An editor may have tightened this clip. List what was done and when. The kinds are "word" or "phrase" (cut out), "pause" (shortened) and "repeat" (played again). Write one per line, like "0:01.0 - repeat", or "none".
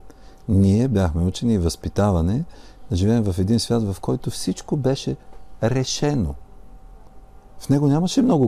none